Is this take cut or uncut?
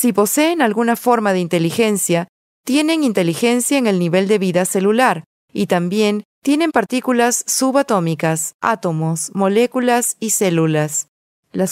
uncut